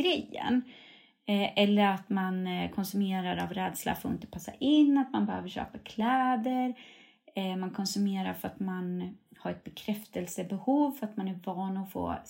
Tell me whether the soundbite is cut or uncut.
uncut